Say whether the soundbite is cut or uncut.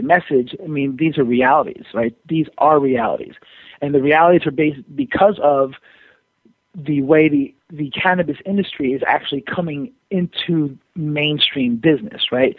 uncut